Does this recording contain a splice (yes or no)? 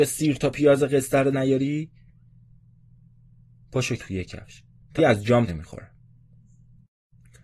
yes